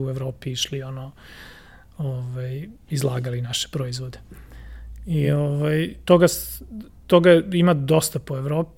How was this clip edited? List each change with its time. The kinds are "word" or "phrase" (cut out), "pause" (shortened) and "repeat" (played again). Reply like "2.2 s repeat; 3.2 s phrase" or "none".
none